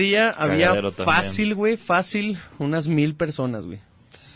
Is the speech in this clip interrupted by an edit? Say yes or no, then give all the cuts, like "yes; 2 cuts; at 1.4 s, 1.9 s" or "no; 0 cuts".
no; 0 cuts